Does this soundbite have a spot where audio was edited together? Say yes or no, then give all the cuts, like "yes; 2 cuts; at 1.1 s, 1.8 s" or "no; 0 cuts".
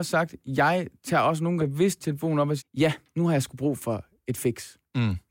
yes; 3 cuts; at 1.6 s, 2.0 s, 2.6 s